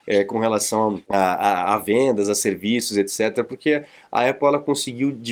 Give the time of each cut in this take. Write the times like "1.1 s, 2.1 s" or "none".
1.0 s